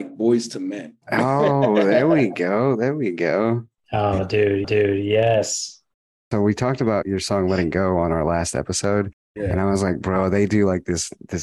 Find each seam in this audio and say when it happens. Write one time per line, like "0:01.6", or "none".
0:01.0
0:04.6
0:07.0